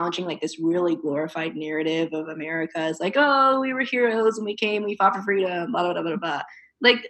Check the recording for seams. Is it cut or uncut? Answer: uncut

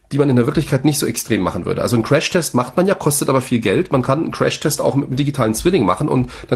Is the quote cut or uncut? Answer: uncut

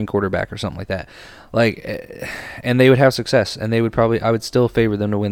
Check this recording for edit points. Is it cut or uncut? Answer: uncut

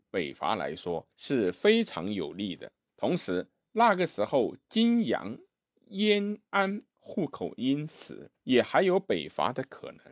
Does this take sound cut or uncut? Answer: cut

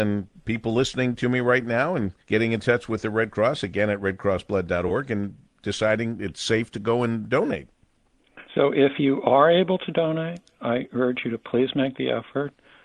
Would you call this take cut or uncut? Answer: cut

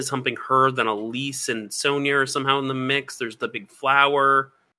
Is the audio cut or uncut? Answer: uncut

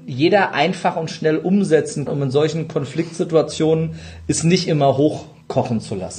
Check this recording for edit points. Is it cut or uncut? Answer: cut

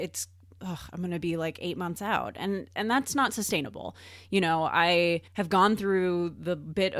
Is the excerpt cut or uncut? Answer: cut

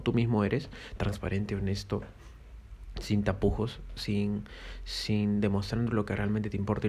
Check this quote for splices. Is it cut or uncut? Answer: uncut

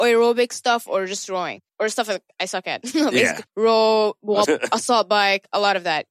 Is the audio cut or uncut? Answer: cut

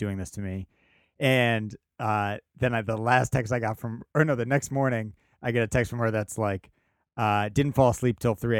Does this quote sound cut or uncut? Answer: uncut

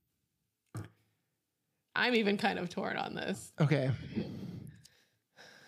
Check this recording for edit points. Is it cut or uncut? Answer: uncut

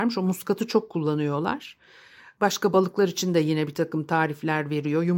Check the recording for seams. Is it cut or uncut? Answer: uncut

